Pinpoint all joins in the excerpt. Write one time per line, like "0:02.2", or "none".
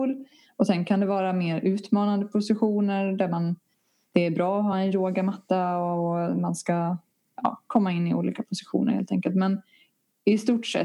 none